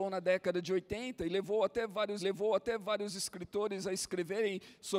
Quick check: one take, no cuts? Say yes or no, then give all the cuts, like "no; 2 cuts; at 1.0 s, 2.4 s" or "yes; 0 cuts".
no; 1 cut; at 2.2 s